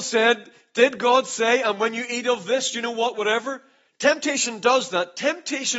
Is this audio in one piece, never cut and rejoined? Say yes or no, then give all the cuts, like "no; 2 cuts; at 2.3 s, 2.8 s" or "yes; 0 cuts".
no; 1 cut; at 3.9 s